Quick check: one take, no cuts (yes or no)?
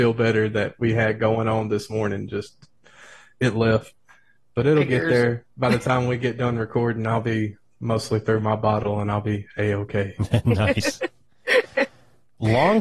no